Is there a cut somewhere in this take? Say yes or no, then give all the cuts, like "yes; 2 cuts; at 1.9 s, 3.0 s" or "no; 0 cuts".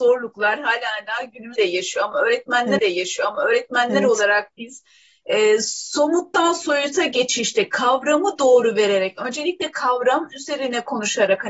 yes; 2 cuts; at 1.6 s, 2.8 s